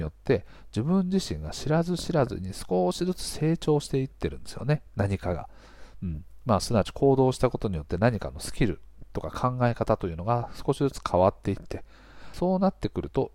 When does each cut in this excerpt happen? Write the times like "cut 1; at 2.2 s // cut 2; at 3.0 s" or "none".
cut 1; at 12.3 s

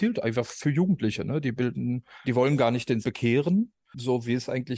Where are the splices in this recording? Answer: cut 1; at 2.2 s // cut 2; at 3.0 s

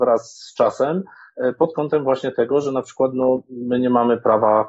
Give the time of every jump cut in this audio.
none

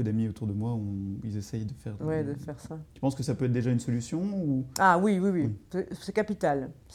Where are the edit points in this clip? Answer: cut 1; at 2.9 s // cut 2; at 5.6 s

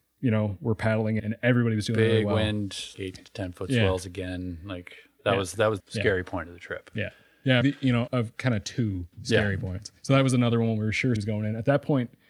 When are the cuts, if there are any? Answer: cut 1; at 1.2 s // cut 2; at 2.9 s // cut 3; at 5.8 s // cut 4; at 7.6 s // cut 5; at 8.1 s // cut 6; at 9.1 s // cut 7; at 10.0 s // cut 8; at 11.2 s

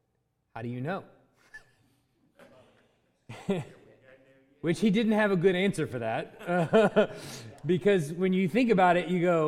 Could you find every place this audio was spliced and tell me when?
cut 1; at 2.5 s

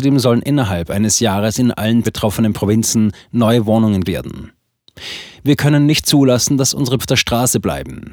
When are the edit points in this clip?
cut 1; at 2.0 s // cut 2; at 4.0 s // cut 3; at 7.0 s

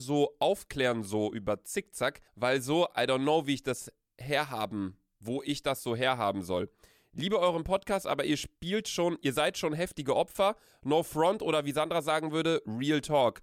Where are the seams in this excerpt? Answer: cut 1; at 2.3 s

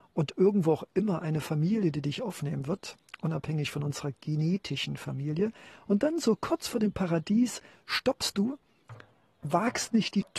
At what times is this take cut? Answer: none

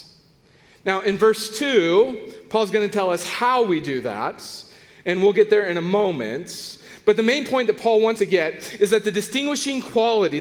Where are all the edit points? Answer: cut 1; at 8.2 s

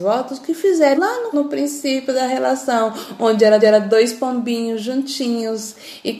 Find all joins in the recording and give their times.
cut 1; at 1.0 s // cut 2; at 1.3 s // cut 3; at 3.6 s

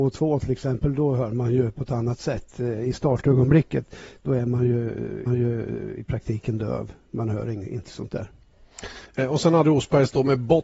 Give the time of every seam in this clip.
cut 1; at 5.3 s // cut 2; at 9.6 s

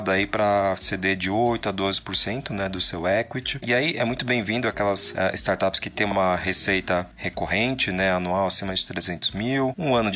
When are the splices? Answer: none

